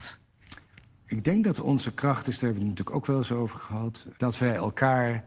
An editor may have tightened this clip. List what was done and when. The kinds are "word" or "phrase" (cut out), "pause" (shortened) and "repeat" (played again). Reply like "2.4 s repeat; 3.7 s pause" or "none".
4.2 s word